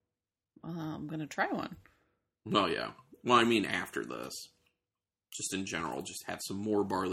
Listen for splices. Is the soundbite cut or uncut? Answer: uncut